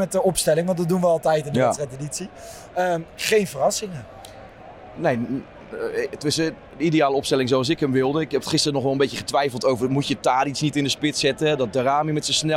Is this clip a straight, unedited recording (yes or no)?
yes